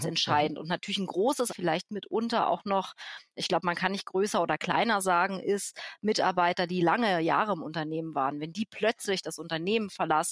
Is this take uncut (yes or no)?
no